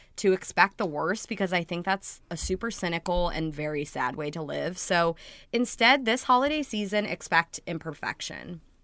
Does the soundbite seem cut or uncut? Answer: uncut